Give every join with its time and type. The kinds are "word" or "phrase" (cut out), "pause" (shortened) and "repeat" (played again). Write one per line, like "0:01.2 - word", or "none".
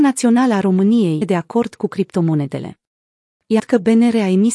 0:01.2 - phrase
0:03.6 - word